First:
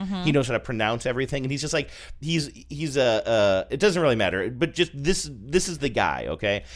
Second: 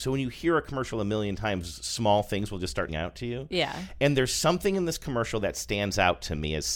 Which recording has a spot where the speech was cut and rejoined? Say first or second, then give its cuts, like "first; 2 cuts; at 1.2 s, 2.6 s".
second; 1 cut; at 2.9 s